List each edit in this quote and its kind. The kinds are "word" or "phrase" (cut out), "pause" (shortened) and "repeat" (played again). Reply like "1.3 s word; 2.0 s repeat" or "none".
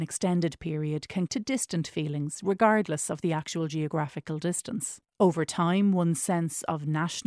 1.3 s word; 5.0 s pause